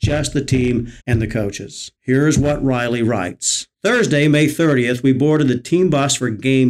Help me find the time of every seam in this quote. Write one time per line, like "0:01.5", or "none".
0:01.0
0:02.0
0:03.7